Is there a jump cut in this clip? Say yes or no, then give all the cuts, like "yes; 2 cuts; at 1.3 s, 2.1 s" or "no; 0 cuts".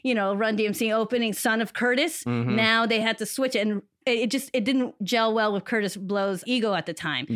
no; 0 cuts